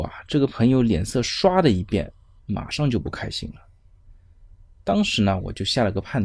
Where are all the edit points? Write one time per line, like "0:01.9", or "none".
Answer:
none